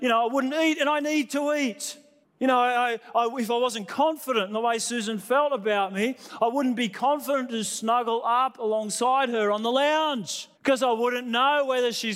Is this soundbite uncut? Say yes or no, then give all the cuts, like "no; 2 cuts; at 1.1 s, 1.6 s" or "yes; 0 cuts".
no; 2 cuts; at 2.2 s, 10.5 s